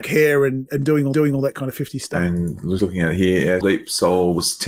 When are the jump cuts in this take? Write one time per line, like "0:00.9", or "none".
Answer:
0:01.1
0:02.8
0:03.6